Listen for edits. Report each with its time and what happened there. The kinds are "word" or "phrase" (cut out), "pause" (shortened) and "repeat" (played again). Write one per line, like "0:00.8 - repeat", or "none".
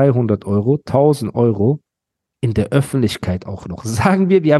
none